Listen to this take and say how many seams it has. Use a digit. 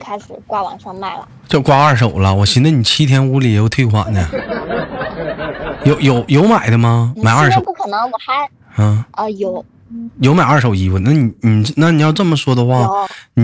0